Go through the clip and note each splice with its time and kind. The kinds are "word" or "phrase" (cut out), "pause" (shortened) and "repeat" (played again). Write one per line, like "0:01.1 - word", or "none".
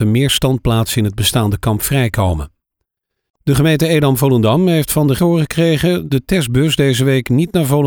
0:05.2 - word
0:06.1 - word